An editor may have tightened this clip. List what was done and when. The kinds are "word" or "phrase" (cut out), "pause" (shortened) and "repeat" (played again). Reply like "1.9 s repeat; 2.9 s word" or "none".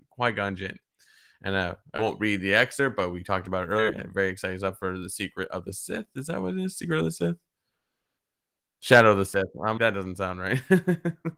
9.8 s word

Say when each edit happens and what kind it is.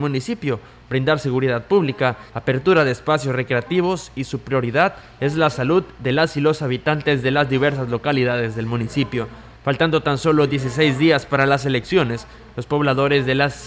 2.3 s pause; 9.5 s pause

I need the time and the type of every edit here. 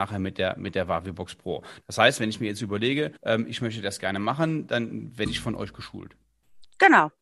3.2 s pause

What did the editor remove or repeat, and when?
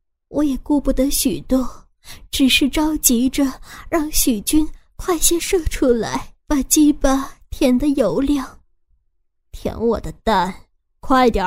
6.4 s pause

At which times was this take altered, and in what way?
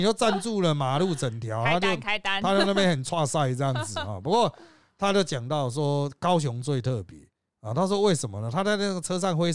none

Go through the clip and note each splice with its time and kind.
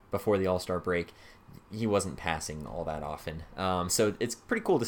none

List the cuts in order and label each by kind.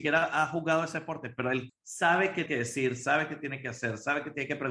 1.7 s word; 2.5 s word

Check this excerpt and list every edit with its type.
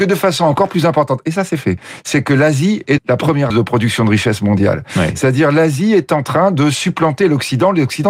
3.0 s word; 3.5 s word

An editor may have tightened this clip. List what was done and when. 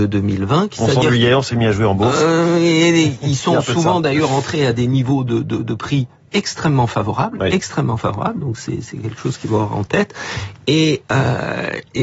none

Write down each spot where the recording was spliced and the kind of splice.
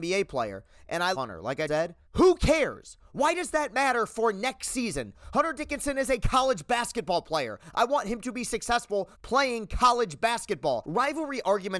1.1 s word; 1.7 s word; 2.0 s pause; 9.1 s pause

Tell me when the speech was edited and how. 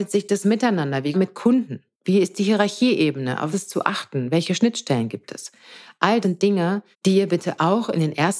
1.1 s phrase; 1.9 s pause; 3.5 s word; 6.2 s word; 6.9 s pause

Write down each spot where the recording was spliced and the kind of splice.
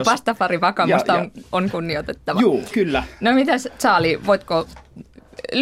none

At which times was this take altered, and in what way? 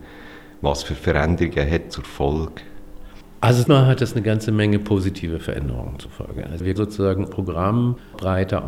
1.9 s word; 3.7 s word; 6.8 s word; 7.2 s word

